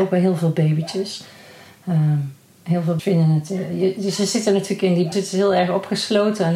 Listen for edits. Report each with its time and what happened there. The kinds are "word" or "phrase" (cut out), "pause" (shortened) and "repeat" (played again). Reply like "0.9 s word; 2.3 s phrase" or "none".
3.0 s word; 5.1 s word